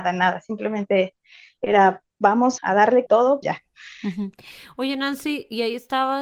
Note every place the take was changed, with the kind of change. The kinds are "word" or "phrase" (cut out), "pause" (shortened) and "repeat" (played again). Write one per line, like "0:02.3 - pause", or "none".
0:02.6 - word
0:03.1 - word
0:03.4 - phrase

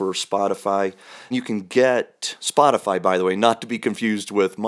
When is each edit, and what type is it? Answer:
0:01.3 - word

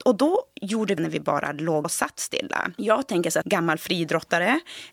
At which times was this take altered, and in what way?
0:01.0 - phrase
0:01.8 - phrase
0:03.4 - word

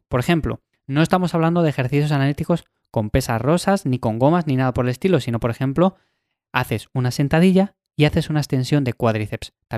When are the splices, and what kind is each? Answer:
none

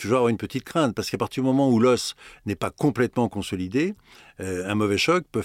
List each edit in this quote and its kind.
none

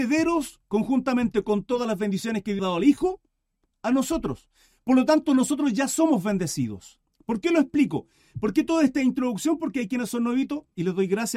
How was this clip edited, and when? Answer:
0:02.6 - phrase
0:07.0 - pause

